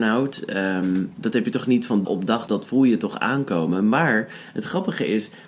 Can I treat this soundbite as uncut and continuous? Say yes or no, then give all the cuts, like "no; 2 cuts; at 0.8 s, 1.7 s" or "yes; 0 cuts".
no; 2 cuts; at 2.0 s, 2.5 s